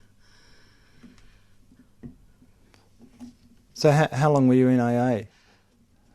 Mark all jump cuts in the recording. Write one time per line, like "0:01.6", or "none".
none